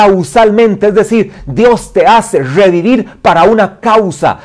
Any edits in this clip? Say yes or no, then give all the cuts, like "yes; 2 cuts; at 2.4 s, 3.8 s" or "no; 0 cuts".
no; 0 cuts